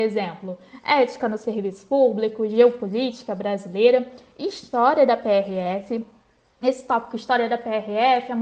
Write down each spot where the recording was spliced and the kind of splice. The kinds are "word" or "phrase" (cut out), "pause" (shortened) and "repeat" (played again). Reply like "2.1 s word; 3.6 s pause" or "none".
none